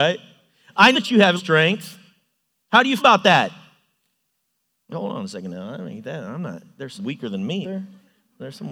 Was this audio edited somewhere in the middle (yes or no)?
yes